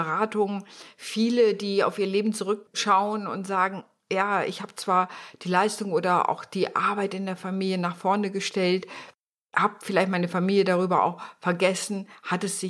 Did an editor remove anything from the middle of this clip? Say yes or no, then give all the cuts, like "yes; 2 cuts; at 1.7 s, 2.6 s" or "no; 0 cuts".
no; 0 cuts